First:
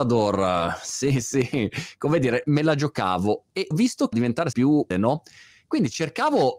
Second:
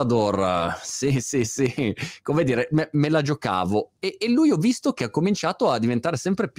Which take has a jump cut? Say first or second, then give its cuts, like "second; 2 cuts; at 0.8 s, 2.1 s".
first; 6 cuts; at 1.2 s, 2.4 s, 3.7 s, 4.1 s, 4.5 s, 4.9 s